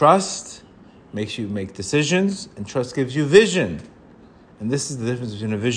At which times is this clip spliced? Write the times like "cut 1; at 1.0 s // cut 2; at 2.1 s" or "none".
none